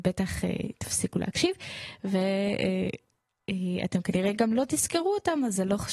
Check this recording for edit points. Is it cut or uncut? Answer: uncut